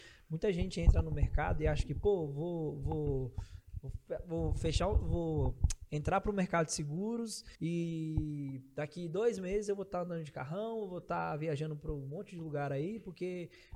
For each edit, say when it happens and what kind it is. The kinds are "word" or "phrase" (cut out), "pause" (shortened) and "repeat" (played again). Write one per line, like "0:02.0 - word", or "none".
0:07.5 - pause